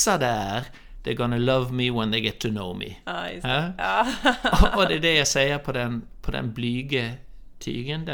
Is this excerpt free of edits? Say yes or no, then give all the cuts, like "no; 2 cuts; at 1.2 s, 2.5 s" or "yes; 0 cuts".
yes; 0 cuts